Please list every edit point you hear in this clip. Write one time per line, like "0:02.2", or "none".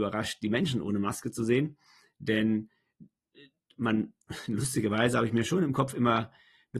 none